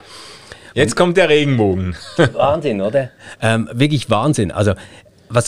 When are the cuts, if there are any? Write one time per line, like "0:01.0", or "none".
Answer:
none